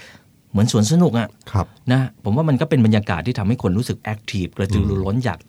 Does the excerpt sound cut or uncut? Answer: cut